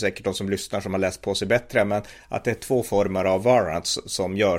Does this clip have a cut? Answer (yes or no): no